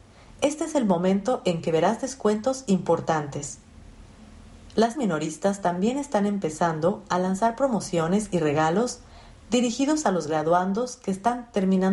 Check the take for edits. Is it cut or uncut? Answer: cut